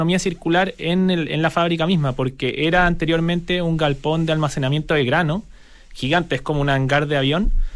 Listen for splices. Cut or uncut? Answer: uncut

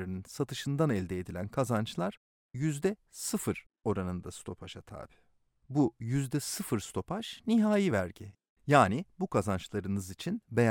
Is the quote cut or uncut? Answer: uncut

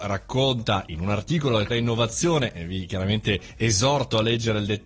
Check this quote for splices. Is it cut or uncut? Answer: cut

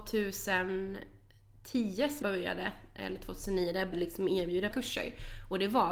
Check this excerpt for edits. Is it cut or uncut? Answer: cut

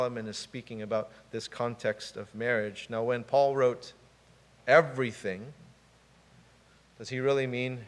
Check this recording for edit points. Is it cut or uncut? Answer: uncut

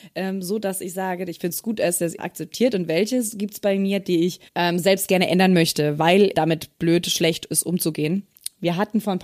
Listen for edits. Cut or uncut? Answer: cut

